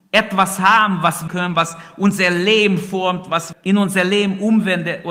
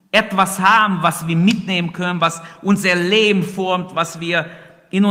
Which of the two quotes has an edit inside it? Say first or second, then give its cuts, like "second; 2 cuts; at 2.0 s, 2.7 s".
first; 2 cuts; at 1.3 s, 3.5 s